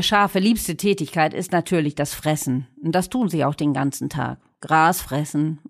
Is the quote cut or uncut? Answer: uncut